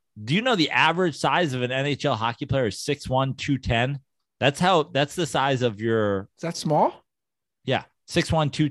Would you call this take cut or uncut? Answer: uncut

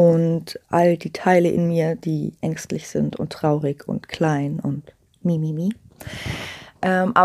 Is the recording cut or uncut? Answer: uncut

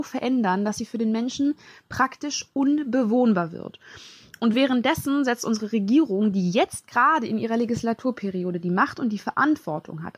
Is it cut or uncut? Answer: uncut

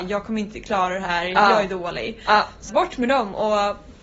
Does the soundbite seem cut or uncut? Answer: cut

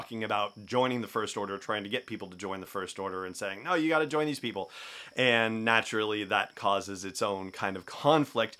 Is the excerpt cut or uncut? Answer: uncut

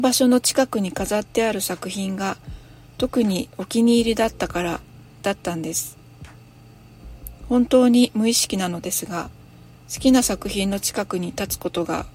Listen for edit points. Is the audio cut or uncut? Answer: uncut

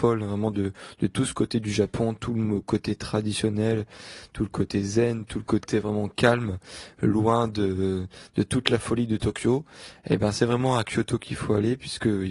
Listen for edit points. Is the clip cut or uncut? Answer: uncut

